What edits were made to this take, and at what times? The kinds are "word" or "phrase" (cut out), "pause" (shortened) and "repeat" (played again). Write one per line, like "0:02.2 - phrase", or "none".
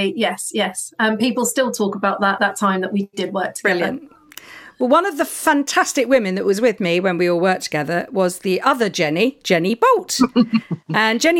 0:02.4 - word